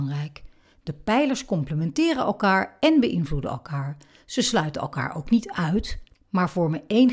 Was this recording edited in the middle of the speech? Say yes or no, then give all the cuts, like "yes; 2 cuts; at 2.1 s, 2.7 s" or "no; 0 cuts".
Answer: no; 0 cuts